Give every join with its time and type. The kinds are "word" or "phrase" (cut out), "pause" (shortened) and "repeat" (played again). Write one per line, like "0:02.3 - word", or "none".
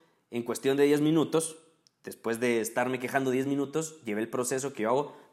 none